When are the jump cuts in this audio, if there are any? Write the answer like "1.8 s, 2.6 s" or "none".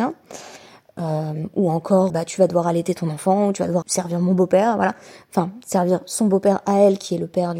2.1 s, 3.8 s

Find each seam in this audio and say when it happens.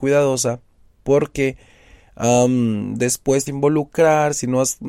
3.5 s

